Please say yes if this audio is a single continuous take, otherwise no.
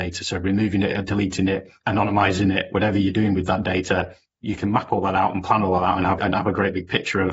no